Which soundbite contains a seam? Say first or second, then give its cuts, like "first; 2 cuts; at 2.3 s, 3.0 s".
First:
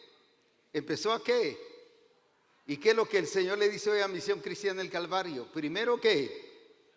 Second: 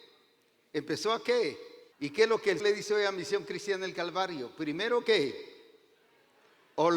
second; 2 cuts; at 1.9 s, 2.6 s